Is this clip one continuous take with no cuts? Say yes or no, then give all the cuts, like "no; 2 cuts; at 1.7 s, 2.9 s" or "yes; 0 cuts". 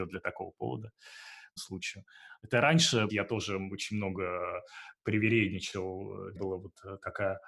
no; 3 cuts; at 1.6 s, 3.1 s, 6.4 s